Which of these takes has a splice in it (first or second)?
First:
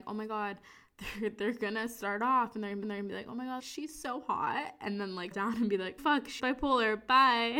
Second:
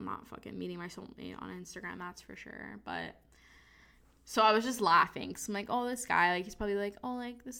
first